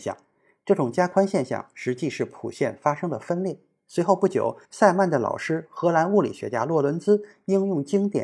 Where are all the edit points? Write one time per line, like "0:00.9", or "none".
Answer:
0:04.6